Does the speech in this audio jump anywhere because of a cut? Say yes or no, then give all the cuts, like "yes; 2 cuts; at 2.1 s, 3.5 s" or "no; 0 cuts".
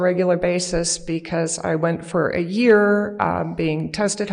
no; 0 cuts